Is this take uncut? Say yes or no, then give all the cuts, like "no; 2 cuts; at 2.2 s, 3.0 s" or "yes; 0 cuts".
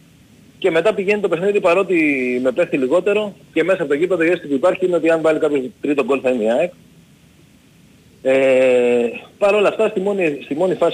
no; 2 cuts; at 3.4 s, 9.3 s